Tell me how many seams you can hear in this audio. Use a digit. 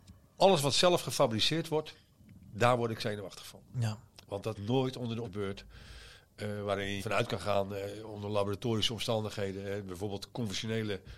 3